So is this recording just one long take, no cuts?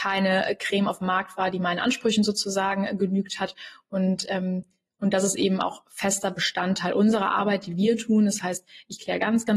yes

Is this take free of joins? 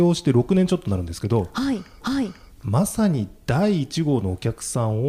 no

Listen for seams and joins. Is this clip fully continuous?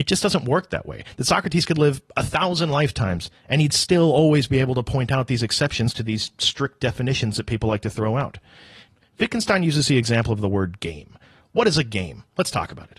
yes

